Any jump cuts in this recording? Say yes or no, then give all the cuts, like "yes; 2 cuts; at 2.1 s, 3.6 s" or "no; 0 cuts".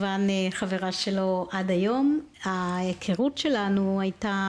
yes; 1 cut; at 2.3 s